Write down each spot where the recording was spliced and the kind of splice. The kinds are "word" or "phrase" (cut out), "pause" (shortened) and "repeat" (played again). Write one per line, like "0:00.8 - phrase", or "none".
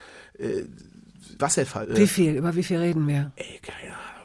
0:01.4 - word